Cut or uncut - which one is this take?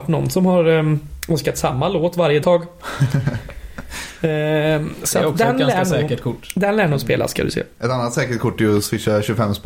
cut